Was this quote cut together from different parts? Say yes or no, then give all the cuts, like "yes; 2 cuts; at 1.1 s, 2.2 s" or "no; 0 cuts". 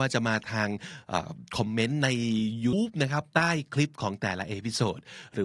yes; 1 cut; at 2.7 s